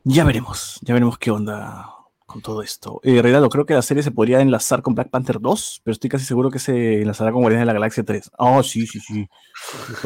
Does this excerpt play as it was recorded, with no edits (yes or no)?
yes